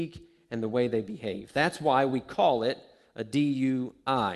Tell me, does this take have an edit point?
no; 0 cuts

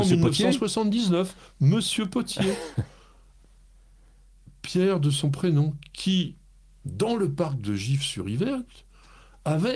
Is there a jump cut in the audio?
no; 0 cuts

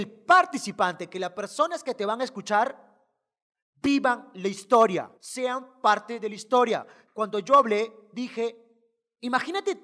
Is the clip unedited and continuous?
no; 1 cut; at 5.2 s

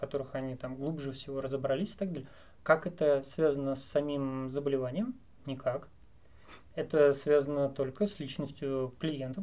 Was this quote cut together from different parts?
no; 0 cuts

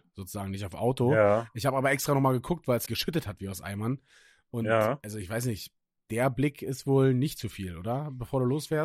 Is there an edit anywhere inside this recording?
yes; 1 cut; at 2.9 s

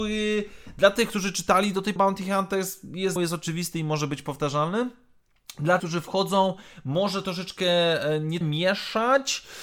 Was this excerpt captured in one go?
no; 4 cuts; at 2.0 s, 3.2 s, 5.8 s, 8.4 s

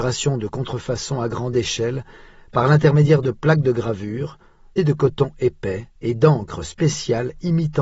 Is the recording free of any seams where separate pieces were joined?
no; 2 cuts; at 4.8 s, 6.0 s

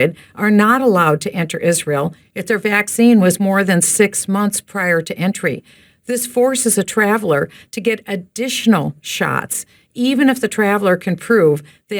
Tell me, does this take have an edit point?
no; 0 cuts

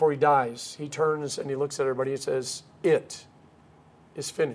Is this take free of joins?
yes; 0 cuts

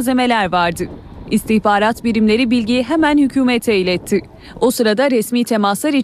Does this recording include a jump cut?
no; 0 cuts

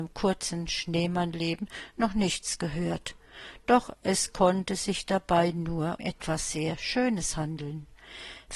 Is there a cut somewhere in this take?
yes; 1 cut; at 6.0 s

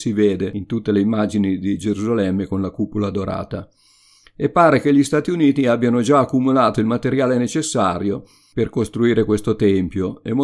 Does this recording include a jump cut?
no; 0 cuts

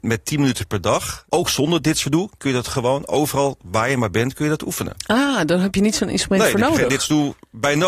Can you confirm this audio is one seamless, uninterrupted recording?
no; 1 cut; at 1.3 s

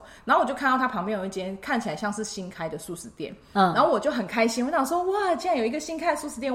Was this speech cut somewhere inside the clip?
no; 0 cuts

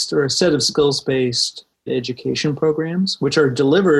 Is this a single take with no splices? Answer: no; 1 cut; at 1.9 s

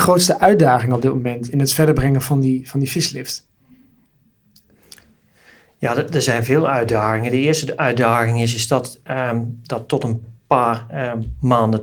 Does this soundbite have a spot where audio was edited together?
no; 0 cuts

